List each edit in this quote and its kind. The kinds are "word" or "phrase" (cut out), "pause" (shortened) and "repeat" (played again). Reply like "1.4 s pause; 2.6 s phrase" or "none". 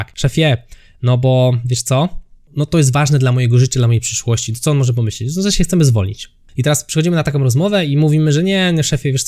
none